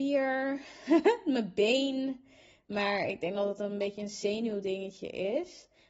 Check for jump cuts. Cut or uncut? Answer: uncut